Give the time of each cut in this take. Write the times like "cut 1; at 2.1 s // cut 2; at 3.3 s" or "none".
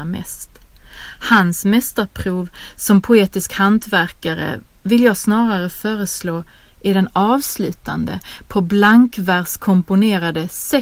none